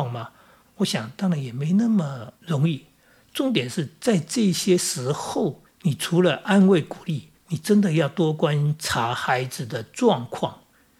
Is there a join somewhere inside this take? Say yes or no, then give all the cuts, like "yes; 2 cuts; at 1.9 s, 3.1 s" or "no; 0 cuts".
yes; 3 cuts; at 2.4 s, 5.7 s, 7.4 s